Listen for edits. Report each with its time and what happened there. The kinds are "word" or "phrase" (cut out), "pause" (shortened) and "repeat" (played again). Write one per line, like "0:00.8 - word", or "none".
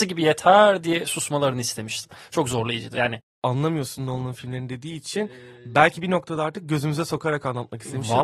none